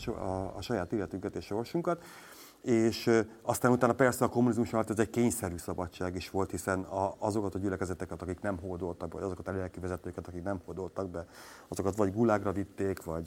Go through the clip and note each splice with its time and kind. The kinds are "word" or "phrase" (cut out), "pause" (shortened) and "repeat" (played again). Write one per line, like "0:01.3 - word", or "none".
none